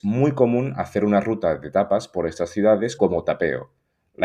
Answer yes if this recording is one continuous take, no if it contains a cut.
no